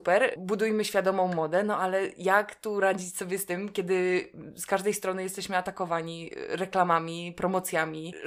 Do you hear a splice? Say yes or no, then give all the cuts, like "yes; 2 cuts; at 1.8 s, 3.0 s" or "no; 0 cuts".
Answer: no; 0 cuts